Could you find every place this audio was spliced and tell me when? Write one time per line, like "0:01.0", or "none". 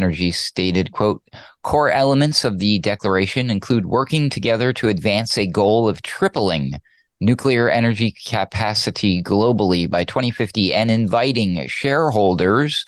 none